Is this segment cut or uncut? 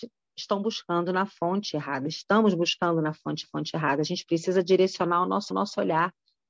cut